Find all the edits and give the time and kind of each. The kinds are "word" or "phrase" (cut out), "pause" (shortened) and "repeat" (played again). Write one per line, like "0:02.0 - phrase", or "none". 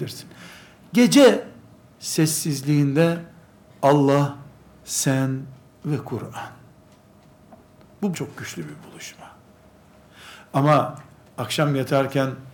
0:08.1 - word